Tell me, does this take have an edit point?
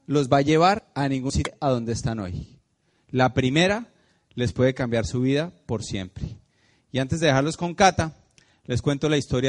no; 0 cuts

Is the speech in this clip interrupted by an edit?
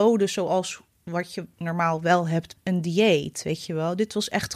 yes; 1 cut; at 2.6 s

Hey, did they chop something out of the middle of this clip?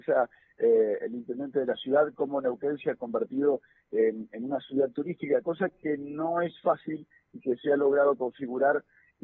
no; 0 cuts

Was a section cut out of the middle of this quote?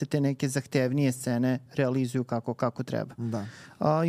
no; 0 cuts

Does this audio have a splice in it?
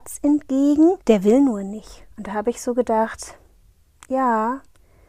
yes; 2 cuts; at 1.0 s, 2.1 s

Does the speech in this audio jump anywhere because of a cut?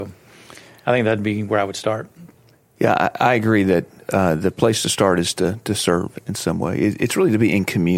no; 0 cuts

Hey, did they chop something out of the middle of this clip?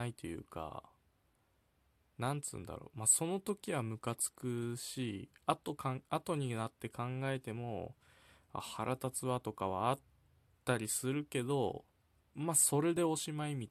no; 0 cuts

